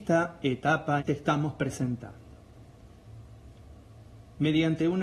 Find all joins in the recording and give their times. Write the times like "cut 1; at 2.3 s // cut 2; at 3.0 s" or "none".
cut 1; at 1.0 s